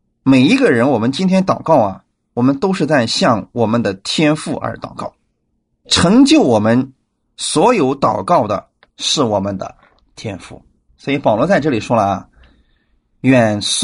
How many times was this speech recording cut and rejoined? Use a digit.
0